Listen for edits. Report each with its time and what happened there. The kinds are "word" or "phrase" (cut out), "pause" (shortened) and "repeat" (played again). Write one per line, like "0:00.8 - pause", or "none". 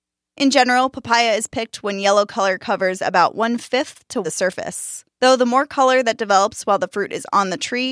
0:04.2 - phrase